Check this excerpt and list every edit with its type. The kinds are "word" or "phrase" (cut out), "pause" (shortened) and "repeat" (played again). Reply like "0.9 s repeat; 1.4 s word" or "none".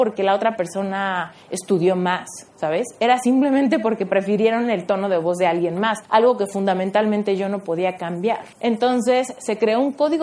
2.5 s pause; 6.0 s pause; 8.5 s pause